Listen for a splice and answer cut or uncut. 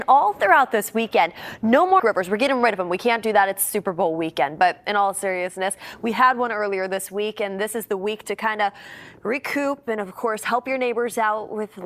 cut